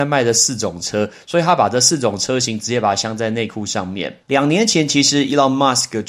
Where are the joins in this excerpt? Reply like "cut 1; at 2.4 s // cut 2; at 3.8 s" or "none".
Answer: cut 1; at 4.2 s